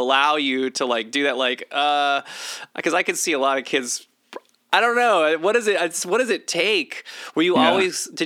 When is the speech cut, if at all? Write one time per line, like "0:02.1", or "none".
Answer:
none

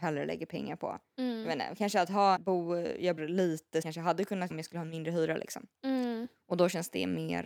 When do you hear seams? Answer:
0:02.4
0:03.2
0:03.8
0:04.5
0:05.8

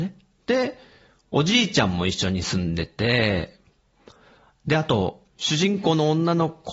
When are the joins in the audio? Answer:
0:05.3

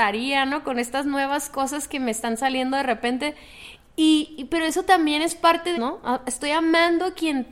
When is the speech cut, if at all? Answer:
0:05.7

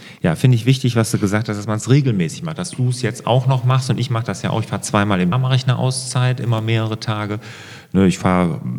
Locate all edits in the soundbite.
0:05.3

